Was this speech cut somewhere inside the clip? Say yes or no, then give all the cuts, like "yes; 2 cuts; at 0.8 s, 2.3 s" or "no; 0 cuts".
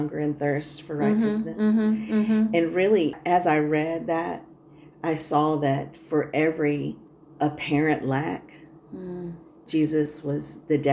no; 0 cuts